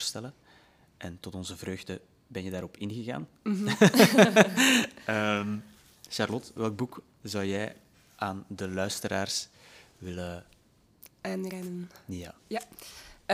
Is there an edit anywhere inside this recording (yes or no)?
no